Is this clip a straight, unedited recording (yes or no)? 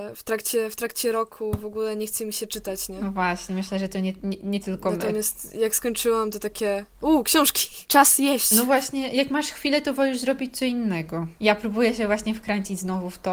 yes